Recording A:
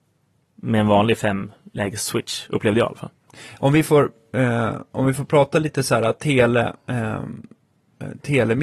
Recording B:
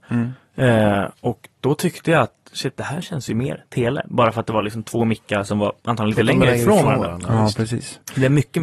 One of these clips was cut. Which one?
B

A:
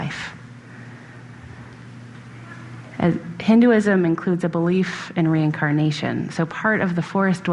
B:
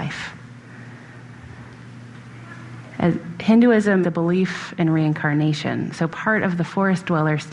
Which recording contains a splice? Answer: B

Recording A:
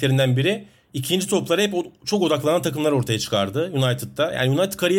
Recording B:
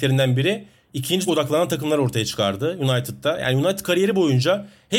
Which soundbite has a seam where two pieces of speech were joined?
B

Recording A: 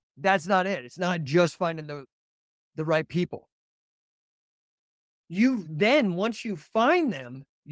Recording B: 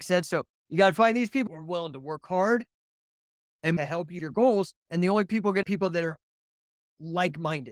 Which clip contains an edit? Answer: B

